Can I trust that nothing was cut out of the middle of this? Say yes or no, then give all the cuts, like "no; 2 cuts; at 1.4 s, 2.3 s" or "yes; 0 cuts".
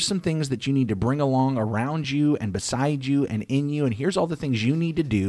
yes; 0 cuts